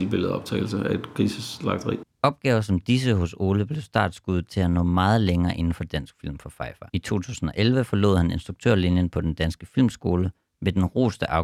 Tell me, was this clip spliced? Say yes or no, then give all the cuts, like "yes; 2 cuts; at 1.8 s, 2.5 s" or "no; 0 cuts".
yes; 1 cut; at 6.9 s